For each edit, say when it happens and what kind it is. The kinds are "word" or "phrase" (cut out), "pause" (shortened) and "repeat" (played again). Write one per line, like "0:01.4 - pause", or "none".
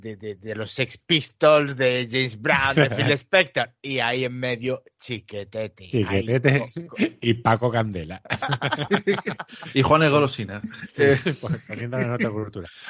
none